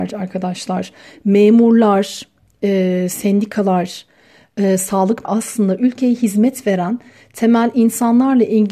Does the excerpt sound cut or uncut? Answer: cut